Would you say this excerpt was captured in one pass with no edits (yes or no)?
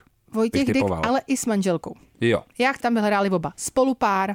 no